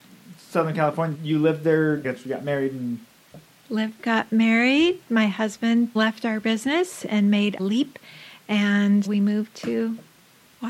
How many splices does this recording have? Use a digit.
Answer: 6